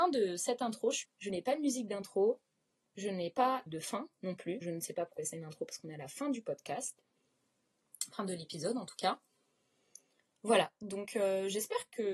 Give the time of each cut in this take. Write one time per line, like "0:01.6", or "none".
0:01.0
0:03.7
0:04.6
0:05.2